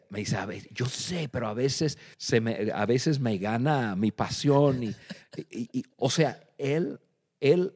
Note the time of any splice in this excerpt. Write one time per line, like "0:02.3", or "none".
0:02.1